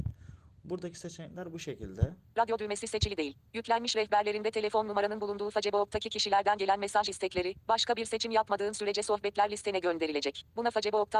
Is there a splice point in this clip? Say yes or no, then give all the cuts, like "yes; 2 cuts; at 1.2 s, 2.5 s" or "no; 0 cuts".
no; 0 cuts